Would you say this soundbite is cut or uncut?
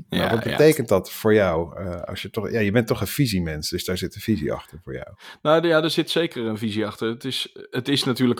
uncut